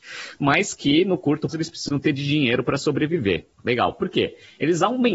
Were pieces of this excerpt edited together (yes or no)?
yes